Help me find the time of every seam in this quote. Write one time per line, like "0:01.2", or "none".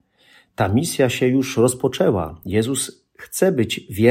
none